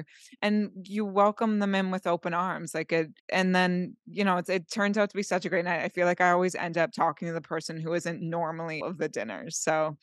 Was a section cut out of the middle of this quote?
yes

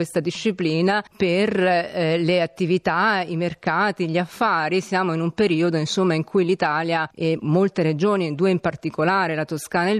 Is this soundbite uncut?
no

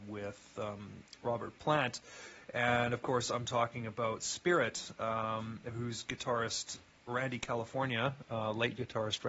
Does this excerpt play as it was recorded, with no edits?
yes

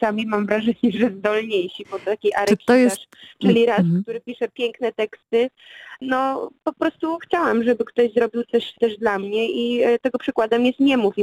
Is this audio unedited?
yes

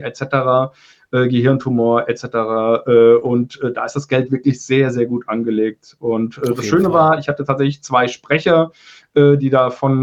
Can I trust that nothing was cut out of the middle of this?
yes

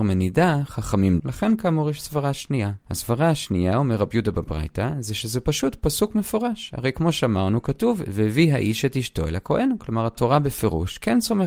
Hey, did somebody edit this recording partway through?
yes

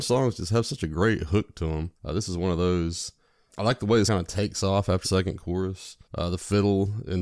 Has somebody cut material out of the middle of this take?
yes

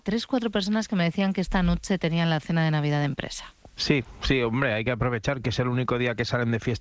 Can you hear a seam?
no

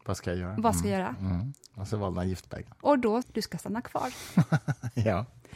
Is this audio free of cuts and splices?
no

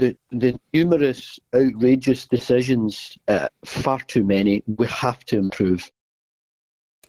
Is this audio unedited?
no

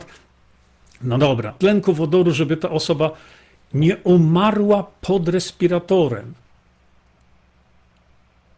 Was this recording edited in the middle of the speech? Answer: yes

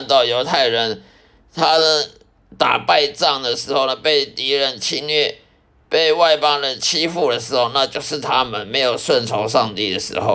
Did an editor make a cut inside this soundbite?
no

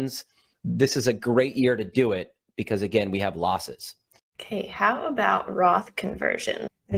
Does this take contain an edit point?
no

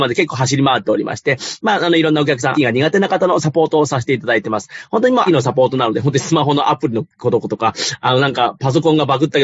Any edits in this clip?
yes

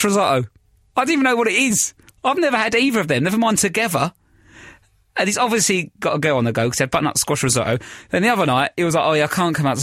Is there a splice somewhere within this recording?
no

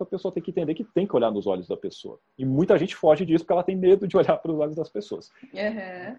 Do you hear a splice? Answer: no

